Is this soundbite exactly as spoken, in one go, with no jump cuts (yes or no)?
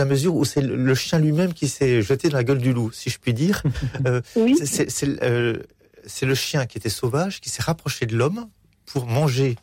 yes